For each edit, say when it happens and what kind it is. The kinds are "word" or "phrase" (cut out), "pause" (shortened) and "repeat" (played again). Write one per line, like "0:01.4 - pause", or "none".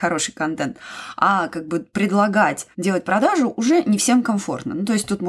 0:02.7 - pause